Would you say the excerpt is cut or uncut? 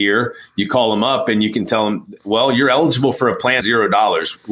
cut